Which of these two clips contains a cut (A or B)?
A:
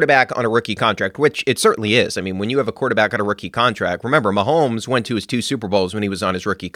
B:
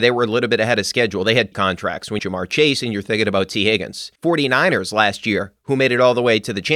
B